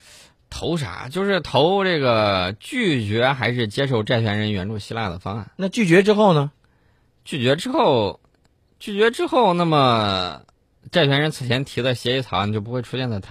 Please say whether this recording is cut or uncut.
uncut